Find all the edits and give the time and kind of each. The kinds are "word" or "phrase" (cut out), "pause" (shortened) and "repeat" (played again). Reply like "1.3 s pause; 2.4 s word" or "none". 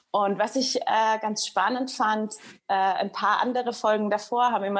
none